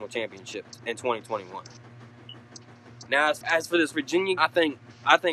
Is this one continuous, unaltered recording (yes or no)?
no